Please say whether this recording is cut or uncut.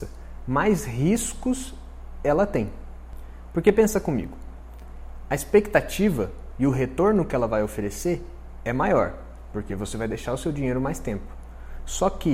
uncut